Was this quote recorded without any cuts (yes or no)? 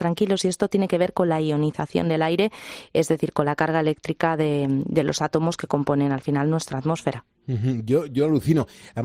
yes